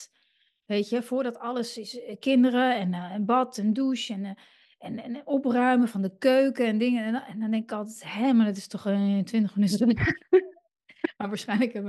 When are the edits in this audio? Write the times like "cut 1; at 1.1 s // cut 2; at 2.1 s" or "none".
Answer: none